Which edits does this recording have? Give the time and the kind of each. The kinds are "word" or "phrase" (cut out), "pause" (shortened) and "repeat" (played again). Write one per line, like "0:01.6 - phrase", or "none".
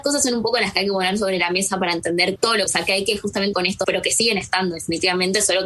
0:02.4 - word
0:02.7 - word
0:03.5 - word
0:03.8 - word